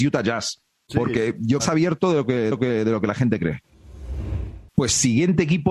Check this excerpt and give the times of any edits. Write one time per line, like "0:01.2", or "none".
0:01.6
0:02.5
0:04.7